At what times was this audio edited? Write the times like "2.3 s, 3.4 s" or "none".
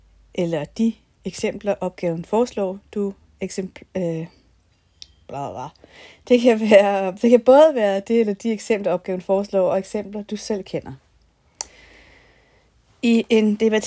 none